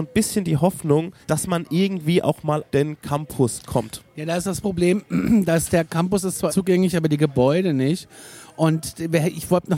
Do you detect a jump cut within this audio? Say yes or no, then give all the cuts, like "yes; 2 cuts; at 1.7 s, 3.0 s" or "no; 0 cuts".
yes; 3 cuts; at 1.2 s, 2.7 s, 6.5 s